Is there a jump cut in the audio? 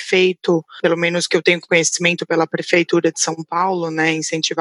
no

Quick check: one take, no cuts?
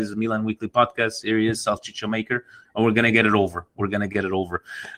yes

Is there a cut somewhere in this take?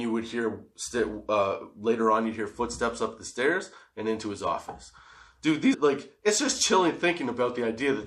yes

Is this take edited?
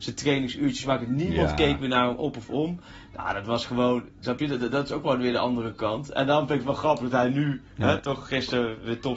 no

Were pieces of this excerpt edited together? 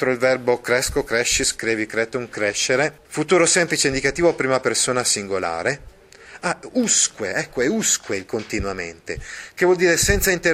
yes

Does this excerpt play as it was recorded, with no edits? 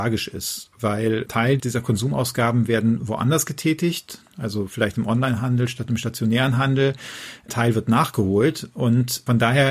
yes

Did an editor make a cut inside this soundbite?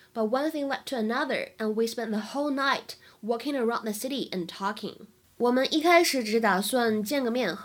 no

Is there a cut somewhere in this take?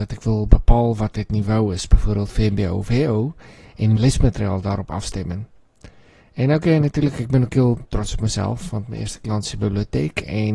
yes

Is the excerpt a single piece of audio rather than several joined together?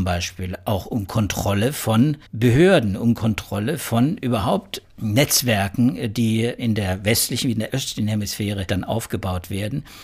no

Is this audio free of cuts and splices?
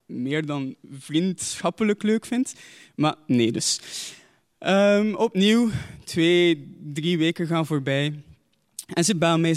yes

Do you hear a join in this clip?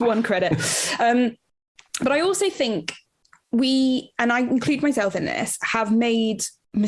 no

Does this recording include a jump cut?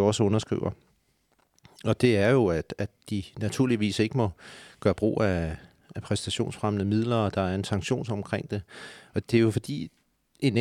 yes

